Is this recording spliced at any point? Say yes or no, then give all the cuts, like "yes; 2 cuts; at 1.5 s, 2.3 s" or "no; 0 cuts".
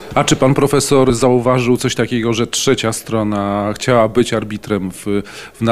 no; 0 cuts